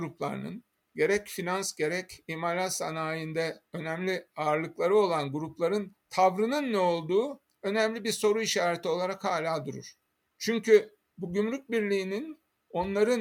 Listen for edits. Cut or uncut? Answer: uncut